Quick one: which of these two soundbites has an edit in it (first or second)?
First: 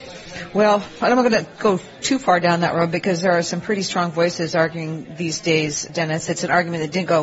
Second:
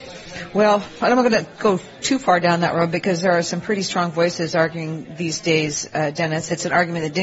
first